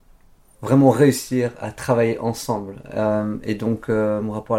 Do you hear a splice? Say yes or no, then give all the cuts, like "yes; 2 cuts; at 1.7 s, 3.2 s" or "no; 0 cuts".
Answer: no; 0 cuts